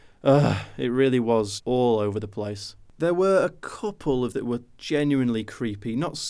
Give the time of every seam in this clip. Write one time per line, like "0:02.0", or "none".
0:01.6
0:04.3